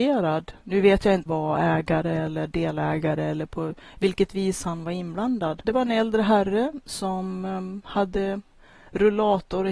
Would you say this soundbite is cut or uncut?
cut